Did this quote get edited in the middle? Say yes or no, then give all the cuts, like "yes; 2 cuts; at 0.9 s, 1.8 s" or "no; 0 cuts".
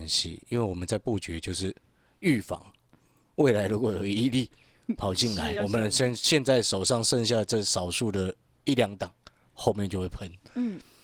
yes; 1 cut; at 5.6 s